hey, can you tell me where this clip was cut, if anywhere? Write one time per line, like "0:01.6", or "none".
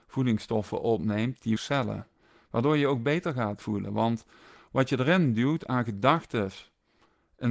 0:01.6
0:02.2